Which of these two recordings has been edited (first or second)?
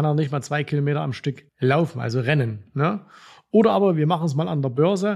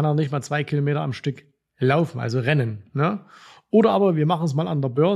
first